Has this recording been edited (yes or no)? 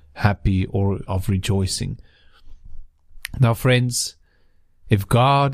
yes